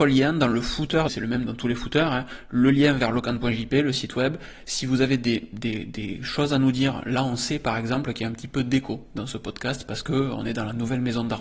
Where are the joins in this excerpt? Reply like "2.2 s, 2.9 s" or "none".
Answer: 1.1 s